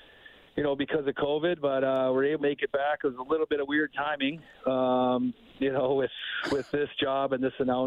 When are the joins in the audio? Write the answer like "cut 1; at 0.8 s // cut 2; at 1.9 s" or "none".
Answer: cut 1; at 2.4 s